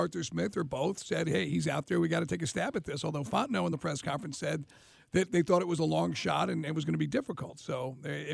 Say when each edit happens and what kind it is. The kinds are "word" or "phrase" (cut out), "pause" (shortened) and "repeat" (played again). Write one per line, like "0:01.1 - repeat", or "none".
none